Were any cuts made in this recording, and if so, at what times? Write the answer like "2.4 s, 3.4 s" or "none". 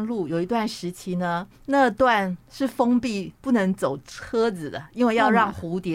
1.5 s, 3.4 s